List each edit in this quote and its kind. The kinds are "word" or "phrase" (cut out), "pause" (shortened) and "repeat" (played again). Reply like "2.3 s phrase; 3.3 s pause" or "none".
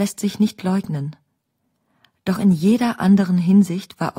none